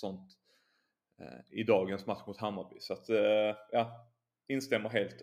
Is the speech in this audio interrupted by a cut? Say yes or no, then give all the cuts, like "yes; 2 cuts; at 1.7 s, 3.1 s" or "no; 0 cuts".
no; 0 cuts